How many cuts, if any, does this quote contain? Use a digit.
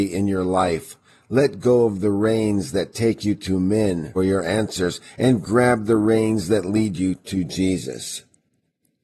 1